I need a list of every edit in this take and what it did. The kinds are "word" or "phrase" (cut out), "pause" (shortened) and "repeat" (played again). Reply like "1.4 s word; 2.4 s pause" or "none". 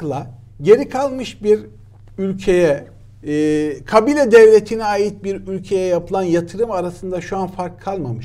none